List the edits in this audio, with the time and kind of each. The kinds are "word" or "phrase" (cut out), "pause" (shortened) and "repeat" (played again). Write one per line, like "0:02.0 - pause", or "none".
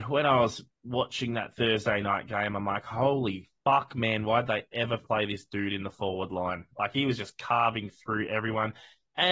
0:03.6 - pause

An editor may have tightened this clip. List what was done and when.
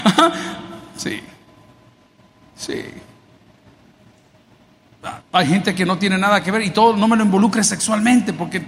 0:05.2 - pause

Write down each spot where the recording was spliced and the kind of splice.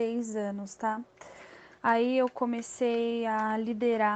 0:01.8 - pause

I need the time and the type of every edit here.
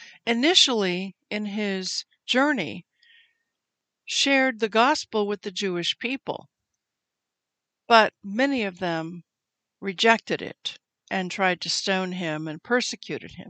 none

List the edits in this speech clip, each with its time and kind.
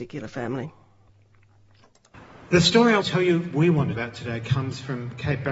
0:03.0 - word
0:03.9 - phrase

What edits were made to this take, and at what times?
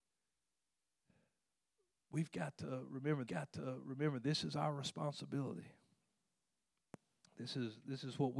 0:03.3 - repeat

